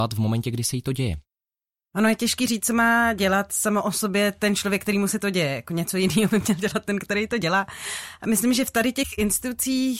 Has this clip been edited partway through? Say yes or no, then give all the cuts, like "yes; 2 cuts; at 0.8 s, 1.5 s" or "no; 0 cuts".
no; 0 cuts